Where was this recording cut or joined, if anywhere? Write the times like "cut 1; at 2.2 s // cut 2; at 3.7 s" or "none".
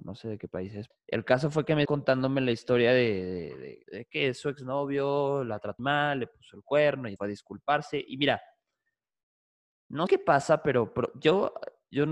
cut 1; at 0.9 s // cut 2; at 1.9 s // cut 3; at 3.8 s // cut 4; at 5.8 s // cut 5; at 7.2 s // cut 6; at 10.1 s